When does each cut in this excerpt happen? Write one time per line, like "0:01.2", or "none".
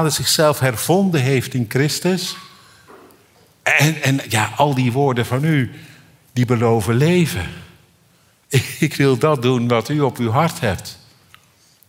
none